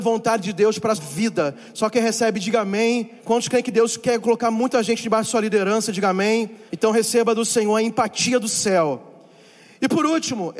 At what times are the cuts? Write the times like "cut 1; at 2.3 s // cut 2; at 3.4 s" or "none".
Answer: cut 1; at 1.0 s // cut 2; at 3.2 s // cut 3; at 6.7 s